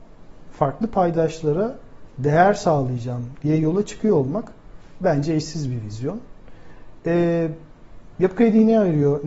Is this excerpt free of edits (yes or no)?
yes